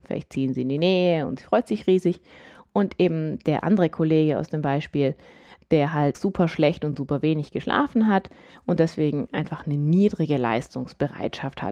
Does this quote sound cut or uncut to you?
cut